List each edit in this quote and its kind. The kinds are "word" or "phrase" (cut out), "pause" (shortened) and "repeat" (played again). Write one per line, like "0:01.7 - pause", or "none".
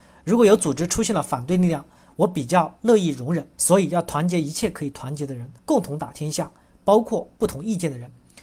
0:03.5 - pause
0:05.6 - pause